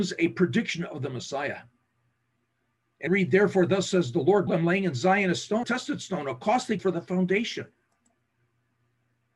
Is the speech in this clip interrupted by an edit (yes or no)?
yes